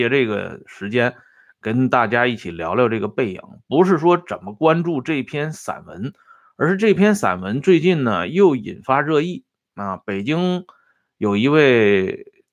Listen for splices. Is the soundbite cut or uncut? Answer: uncut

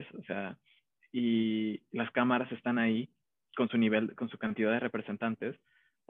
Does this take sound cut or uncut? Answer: uncut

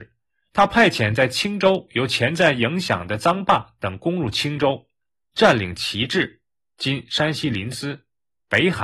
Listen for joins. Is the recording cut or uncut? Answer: uncut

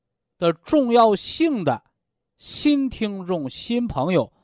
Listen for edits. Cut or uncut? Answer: uncut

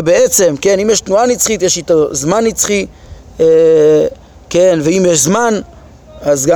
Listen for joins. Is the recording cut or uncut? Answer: uncut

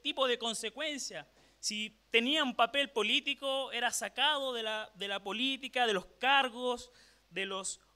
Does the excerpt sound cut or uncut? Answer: uncut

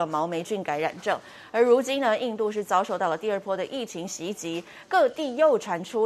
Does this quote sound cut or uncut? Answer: uncut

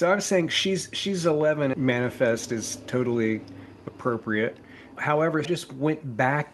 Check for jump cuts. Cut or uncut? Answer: cut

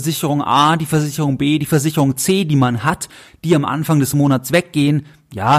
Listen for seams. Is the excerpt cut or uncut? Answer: uncut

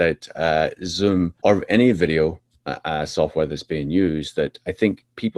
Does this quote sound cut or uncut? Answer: cut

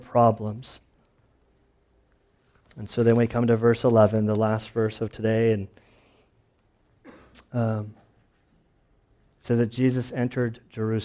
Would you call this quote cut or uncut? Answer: uncut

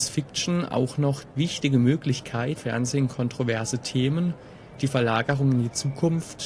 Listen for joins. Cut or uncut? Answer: cut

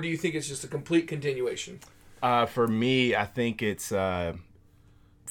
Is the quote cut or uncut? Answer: uncut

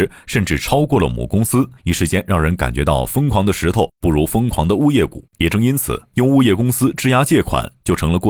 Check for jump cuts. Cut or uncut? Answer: cut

